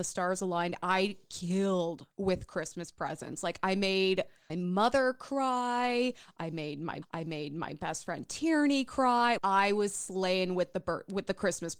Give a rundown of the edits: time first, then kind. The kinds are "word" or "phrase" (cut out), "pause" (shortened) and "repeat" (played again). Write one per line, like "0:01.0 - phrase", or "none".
0:04.5 - word
0:07.0 - repeat
0:09.4 - word